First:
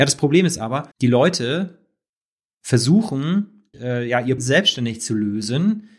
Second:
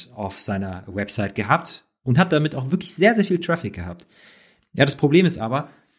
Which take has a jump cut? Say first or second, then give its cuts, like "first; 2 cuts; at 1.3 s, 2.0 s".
first; 3 cuts; at 0.9 s, 3.7 s, 4.4 s